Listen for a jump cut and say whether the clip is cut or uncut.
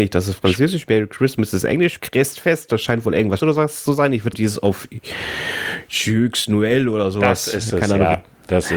cut